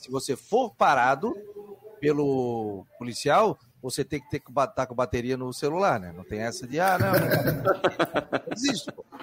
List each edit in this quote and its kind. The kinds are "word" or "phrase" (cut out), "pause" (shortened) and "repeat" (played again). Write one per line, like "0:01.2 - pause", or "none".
none